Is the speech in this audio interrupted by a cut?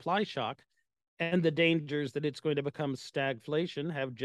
no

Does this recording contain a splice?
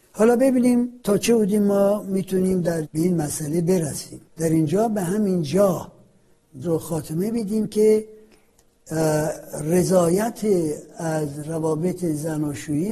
yes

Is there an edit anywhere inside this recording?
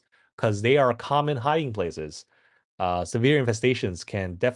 no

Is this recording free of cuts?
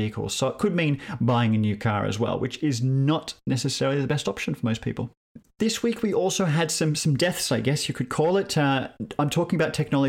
yes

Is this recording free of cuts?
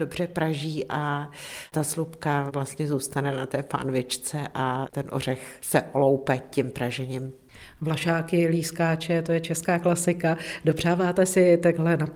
yes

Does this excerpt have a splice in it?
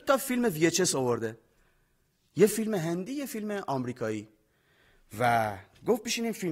no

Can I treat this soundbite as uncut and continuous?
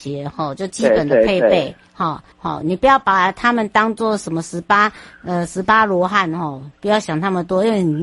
no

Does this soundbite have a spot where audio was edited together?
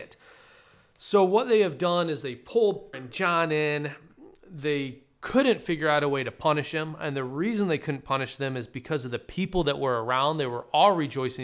yes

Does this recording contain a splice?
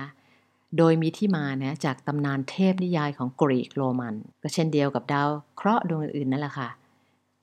yes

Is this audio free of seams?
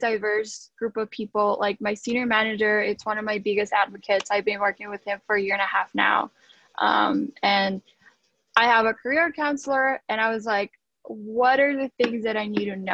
yes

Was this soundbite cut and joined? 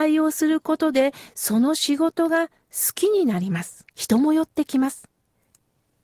yes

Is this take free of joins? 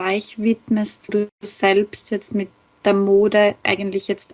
no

